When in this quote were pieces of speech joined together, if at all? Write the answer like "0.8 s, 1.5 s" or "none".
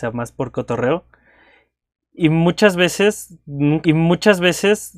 3.8 s